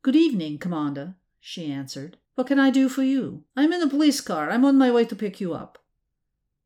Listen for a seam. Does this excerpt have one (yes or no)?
yes